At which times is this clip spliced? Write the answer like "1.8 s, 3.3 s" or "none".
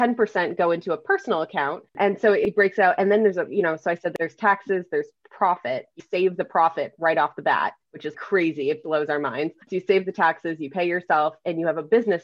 1.9 s, 6.0 s, 7.8 s, 8.1 s, 9.6 s, 10.0 s